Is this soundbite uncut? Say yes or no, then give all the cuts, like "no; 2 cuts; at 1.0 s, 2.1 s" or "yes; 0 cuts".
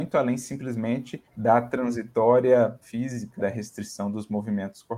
no; 3 cuts; at 1.3 s, 2.8 s, 3.4 s